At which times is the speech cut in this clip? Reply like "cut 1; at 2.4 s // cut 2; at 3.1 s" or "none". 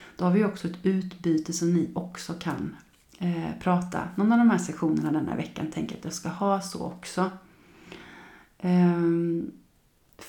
none